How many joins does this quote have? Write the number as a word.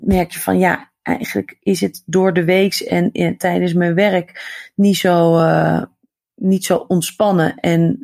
zero